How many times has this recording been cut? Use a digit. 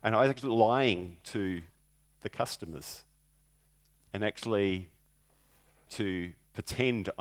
1